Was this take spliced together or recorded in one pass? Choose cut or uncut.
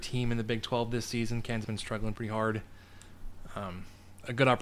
cut